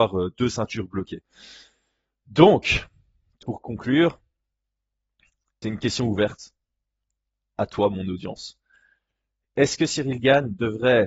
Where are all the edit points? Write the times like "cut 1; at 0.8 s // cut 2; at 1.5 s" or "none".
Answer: cut 1; at 3.4 s // cut 2; at 5.6 s